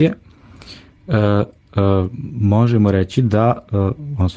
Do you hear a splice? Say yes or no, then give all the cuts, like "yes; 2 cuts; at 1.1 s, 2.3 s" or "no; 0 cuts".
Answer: no; 0 cuts